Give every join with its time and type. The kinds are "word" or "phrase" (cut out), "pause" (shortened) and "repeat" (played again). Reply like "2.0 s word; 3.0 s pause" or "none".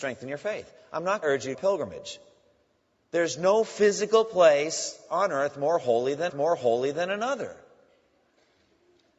1.2 s phrase; 1.5 s phrase; 6.3 s repeat